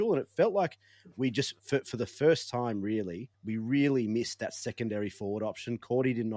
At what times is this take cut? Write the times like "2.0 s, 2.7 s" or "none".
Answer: 3.3 s